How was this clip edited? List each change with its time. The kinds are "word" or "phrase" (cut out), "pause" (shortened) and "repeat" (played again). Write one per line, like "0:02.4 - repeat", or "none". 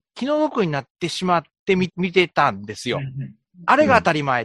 0:00.9 - pause